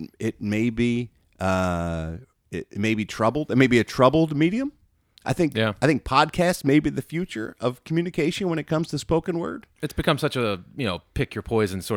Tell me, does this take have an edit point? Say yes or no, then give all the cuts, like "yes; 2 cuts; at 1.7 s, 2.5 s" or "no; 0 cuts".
no; 0 cuts